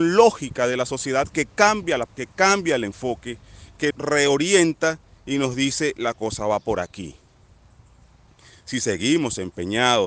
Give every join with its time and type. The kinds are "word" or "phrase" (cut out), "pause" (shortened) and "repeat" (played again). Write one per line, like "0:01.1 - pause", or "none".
0:02.1 - word
0:03.9 - word